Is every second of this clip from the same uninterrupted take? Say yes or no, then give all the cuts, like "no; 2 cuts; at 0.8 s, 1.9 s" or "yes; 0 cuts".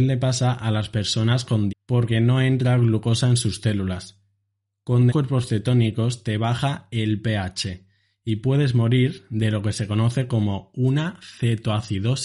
no; 2 cuts; at 1.7 s, 5.1 s